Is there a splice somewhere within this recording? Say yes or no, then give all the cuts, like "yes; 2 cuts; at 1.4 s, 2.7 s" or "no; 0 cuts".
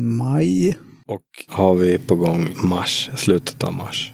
yes; 2 cuts; at 1.5 s, 2.5 s